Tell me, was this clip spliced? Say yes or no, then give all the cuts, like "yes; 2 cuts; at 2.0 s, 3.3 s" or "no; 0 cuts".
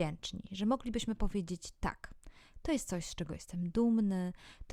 no; 0 cuts